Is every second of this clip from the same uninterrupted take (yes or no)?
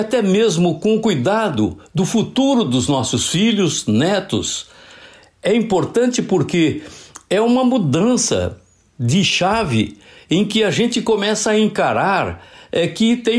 yes